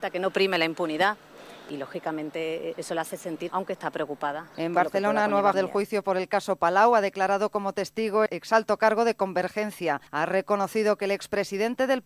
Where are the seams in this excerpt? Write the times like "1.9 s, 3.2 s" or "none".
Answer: 2.7 s, 3.5 s, 4.5 s, 5.5 s, 8.3 s, 10.1 s